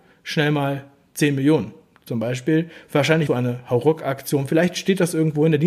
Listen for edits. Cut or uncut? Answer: cut